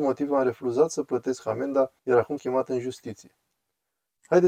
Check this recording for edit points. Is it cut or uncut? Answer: cut